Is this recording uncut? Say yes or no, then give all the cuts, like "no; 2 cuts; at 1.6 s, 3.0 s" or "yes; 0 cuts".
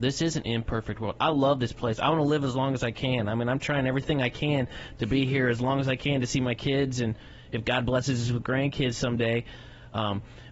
yes; 0 cuts